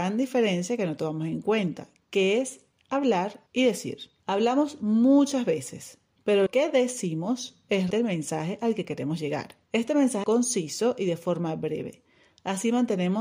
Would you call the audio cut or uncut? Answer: cut